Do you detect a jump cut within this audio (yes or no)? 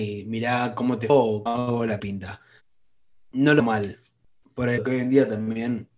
yes